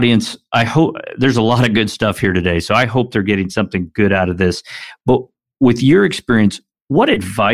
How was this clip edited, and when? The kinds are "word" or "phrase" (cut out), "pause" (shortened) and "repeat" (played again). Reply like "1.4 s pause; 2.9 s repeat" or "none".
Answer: none